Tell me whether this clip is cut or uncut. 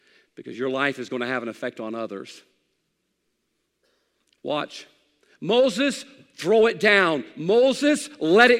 uncut